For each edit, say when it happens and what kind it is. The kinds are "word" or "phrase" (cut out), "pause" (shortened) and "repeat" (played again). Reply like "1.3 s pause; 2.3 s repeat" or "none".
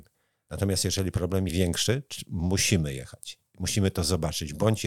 1.5 s word